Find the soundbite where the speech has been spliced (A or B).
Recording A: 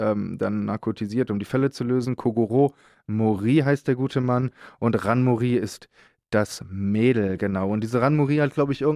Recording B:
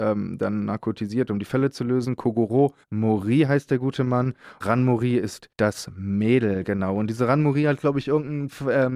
B